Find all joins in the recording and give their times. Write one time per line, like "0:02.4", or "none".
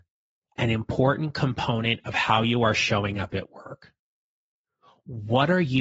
none